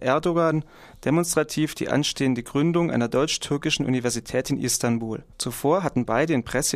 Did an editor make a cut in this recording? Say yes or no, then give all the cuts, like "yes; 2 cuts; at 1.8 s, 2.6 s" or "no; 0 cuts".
yes; 1 cut; at 5.3 s